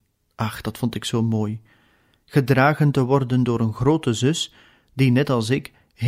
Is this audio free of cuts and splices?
yes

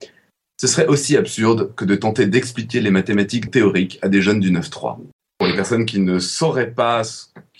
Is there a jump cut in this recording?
yes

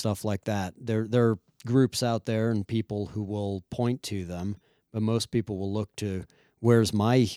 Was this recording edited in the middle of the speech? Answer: no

